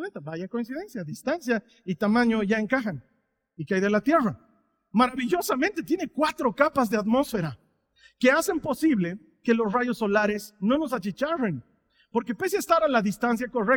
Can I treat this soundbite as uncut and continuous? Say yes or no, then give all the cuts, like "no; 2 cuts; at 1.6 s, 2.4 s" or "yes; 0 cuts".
yes; 0 cuts